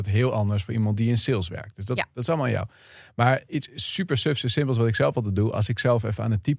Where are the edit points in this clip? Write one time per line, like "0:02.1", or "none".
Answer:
none

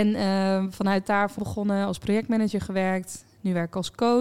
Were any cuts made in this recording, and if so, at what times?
0:01.4

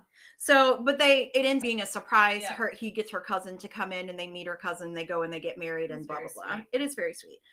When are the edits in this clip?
0:01.6

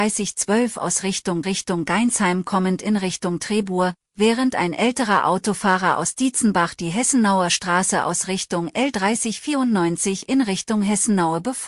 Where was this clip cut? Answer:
0:01.4

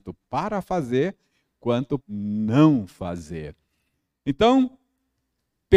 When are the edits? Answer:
0:02.0

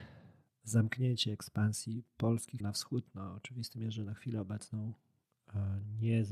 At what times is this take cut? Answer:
0:02.6

